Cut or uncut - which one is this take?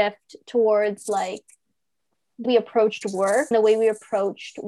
cut